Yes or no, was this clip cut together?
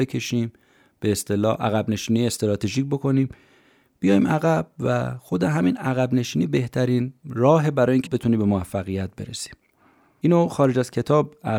yes